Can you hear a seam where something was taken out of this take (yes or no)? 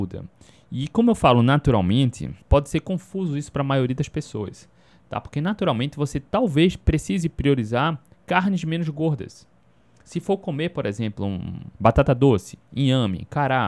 yes